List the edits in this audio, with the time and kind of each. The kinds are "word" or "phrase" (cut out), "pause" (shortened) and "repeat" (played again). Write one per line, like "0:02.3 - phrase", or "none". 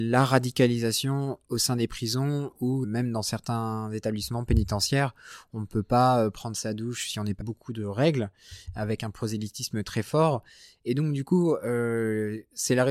0:02.8 - word
0:07.4 - phrase